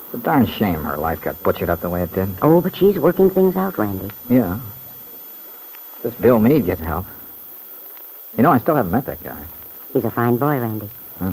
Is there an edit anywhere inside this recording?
yes; 1 cut; at 6.8 s

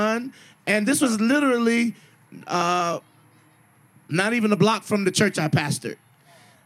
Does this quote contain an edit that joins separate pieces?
no; 0 cuts

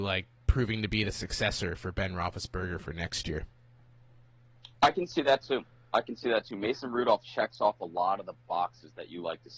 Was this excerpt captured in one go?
no; 2 cuts; at 4.7 s, 7.2 s

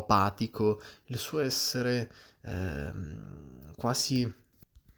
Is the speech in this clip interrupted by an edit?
no; 0 cuts

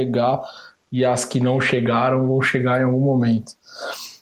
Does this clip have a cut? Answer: no; 0 cuts

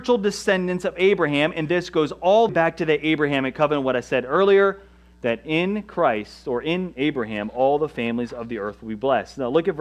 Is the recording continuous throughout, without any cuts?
no; 1 cut; at 2.5 s

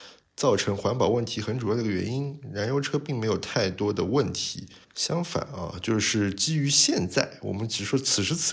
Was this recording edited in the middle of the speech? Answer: yes; 1 cut; at 4.8 s

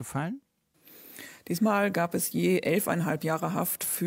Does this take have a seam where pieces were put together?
no; 0 cuts

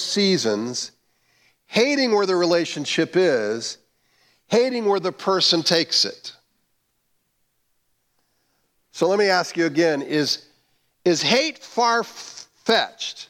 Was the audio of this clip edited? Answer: no; 0 cuts

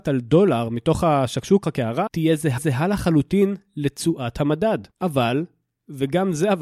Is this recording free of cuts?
no; 4 cuts; at 1.6 s, 2.1 s, 2.6 s, 4.9 s

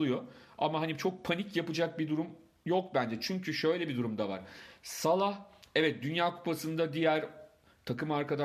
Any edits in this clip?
no; 0 cuts

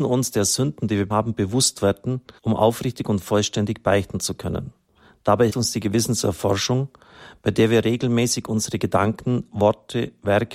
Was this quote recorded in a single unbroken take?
no; 3 cuts; at 1.1 s, 2.4 s, 5.5 s

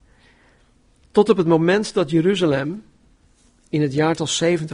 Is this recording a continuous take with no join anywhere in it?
yes; 0 cuts

